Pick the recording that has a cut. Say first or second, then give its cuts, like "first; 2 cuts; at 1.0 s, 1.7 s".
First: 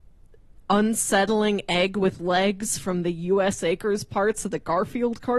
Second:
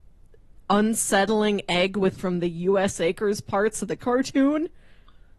second; 2 cuts; at 2.2 s, 4.0 s